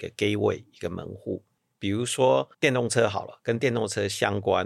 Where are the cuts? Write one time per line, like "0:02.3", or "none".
0:02.5